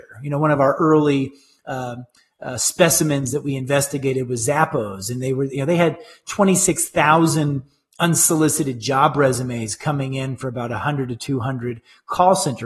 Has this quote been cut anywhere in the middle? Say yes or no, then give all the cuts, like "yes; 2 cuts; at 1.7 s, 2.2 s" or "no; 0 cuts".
no; 0 cuts